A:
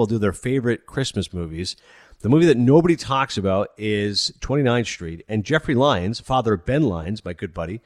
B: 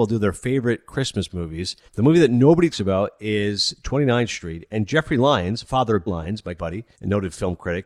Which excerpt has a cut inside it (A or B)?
B